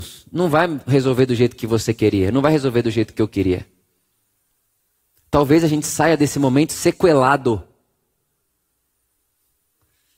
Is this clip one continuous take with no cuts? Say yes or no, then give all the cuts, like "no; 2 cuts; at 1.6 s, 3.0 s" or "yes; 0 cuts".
yes; 0 cuts